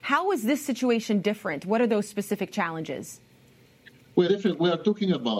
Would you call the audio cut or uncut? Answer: cut